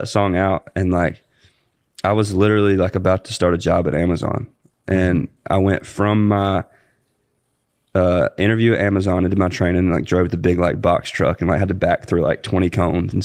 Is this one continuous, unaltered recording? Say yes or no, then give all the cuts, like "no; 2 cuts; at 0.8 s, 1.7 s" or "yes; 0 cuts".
yes; 0 cuts